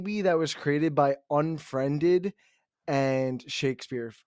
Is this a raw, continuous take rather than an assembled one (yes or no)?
yes